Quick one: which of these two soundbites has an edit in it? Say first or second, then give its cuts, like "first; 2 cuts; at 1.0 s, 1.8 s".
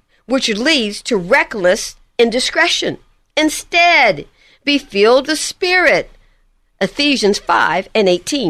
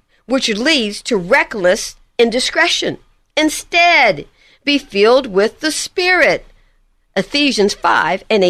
first; 1 cut; at 5.2 s